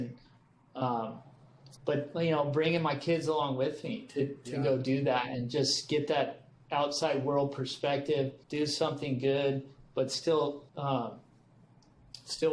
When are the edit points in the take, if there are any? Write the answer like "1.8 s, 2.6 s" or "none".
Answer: 1.8 s, 8.4 s, 10.7 s

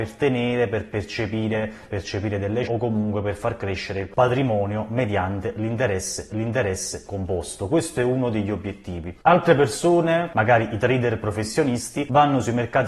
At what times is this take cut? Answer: 1.9 s, 2.6 s, 4.1 s, 6.3 s

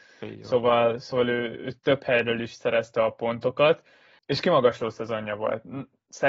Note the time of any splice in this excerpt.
1.8 s

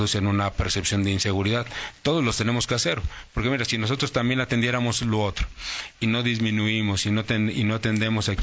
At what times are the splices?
none

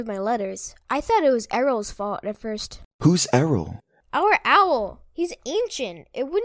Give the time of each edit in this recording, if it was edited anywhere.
none

